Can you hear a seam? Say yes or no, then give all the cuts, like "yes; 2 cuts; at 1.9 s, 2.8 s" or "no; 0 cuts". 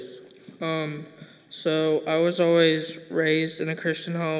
no; 0 cuts